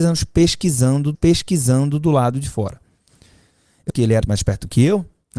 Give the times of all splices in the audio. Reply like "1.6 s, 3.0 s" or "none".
1.1 s, 3.9 s, 4.2 s